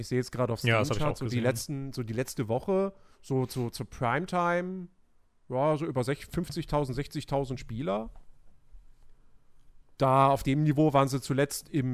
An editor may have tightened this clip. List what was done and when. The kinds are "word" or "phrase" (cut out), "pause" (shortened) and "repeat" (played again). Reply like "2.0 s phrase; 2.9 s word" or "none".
3.1 s pause; 5.2 s pause